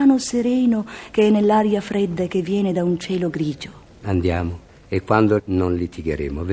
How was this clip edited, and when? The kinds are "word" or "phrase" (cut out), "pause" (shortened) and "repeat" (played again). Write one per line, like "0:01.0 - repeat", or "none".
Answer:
0:05.4 - word